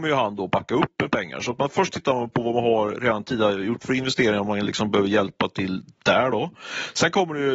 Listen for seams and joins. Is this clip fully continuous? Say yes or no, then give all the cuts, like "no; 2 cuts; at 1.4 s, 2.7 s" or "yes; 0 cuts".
yes; 0 cuts